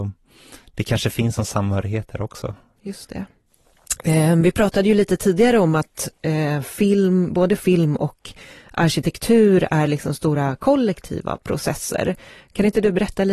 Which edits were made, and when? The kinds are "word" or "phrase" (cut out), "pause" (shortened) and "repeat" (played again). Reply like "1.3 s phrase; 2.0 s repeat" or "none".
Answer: none